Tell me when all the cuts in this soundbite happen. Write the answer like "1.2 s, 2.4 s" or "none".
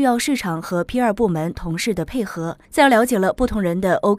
2.6 s